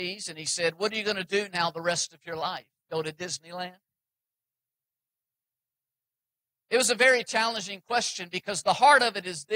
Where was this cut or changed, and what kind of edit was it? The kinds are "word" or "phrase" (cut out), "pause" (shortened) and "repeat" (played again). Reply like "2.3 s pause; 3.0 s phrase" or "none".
none